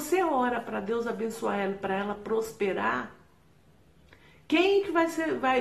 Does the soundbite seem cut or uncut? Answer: uncut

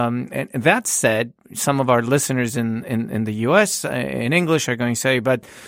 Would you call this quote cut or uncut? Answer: uncut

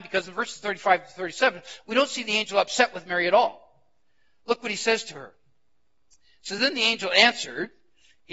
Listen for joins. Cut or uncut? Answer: uncut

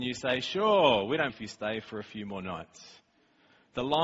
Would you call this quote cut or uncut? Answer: cut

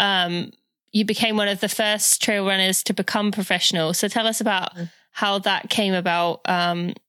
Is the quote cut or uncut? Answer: uncut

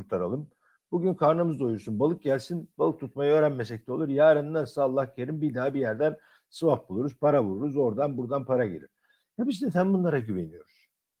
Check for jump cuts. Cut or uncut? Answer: uncut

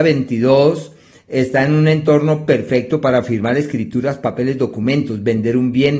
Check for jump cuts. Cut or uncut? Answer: uncut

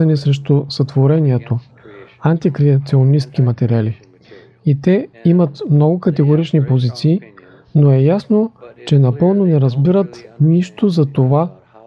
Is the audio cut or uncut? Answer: cut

